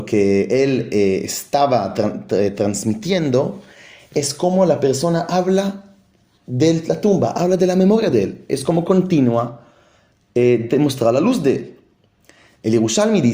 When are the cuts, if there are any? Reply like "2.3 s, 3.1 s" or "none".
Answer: none